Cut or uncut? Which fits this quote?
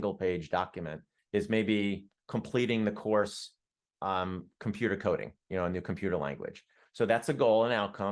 cut